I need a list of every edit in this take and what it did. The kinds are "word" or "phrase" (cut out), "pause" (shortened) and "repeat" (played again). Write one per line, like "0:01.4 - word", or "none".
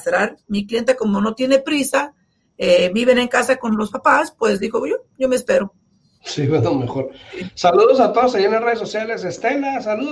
none